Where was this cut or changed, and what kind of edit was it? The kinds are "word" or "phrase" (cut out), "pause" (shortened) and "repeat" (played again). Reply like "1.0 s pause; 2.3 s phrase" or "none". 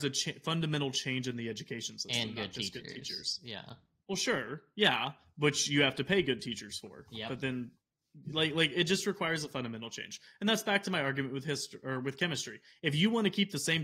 none